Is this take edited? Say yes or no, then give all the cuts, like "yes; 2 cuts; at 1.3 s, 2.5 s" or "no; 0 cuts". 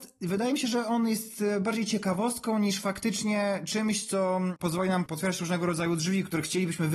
no; 0 cuts